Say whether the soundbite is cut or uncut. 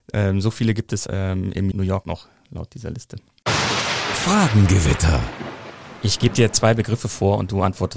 cut